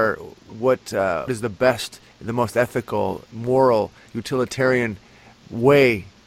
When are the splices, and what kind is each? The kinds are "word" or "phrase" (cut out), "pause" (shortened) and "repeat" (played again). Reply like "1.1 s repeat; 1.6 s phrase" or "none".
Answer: 1.3 s word; 2.1 s pause; 3.3 s pause